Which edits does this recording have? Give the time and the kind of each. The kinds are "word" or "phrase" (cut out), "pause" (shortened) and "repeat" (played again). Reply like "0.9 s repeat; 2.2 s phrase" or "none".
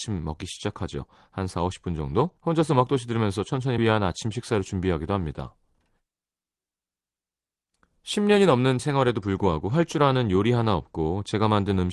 2.4 s pause; 3.8 s phrase; 8.8 s word